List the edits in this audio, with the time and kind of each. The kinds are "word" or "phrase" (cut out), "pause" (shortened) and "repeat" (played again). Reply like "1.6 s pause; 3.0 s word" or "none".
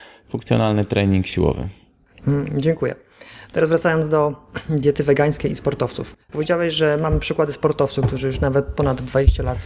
6.2 s pause

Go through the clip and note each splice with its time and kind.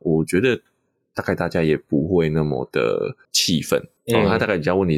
3.2 s pause; 4.0 s pause

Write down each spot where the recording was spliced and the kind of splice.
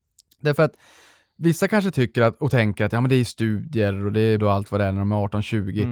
4.4 s word

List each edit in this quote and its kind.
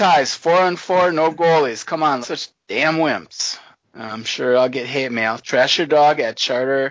2.2 s phrase; 3.8 s pause

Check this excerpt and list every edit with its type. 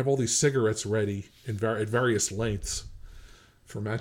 none

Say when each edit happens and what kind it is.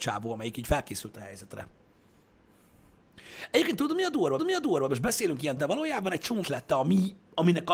4.4 s repeat; 5.6 s word; 6.4 s word

